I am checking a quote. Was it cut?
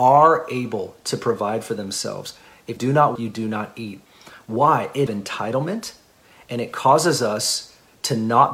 yes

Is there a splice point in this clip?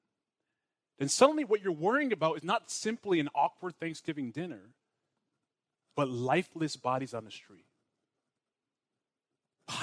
no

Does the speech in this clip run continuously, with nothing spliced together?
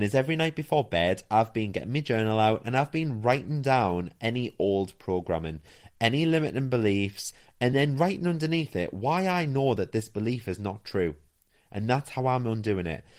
yes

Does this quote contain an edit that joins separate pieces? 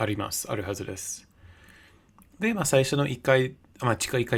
no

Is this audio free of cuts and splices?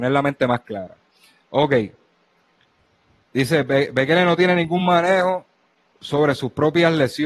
yes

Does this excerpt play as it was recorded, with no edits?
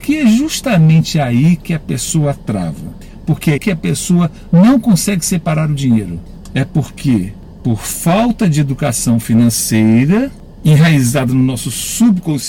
no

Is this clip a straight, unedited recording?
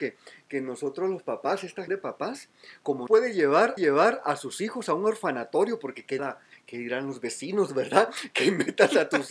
no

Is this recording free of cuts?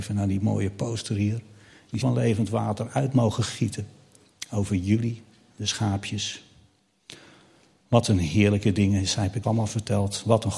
no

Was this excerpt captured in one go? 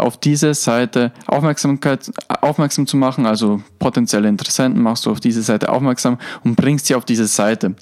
yes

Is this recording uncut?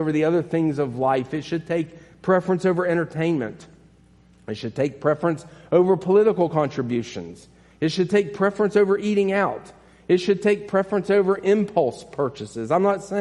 yes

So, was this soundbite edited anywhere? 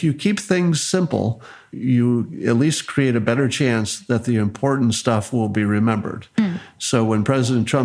no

